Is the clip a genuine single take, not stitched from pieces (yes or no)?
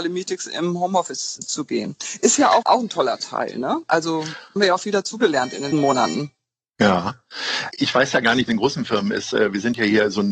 no